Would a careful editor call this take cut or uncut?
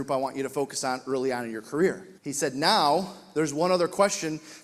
cut